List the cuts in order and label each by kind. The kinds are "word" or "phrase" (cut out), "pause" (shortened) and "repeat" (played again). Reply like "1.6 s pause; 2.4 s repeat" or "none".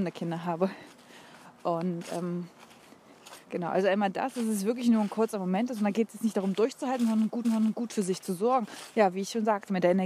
3.4 s pause; 7.4 s repeat